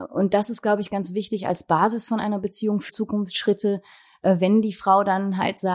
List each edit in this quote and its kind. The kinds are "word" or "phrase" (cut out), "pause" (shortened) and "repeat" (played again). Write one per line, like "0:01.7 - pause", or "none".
0:02.9 - word